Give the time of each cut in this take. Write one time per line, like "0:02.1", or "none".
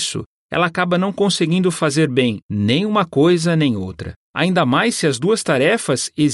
0:02.4
0:04.2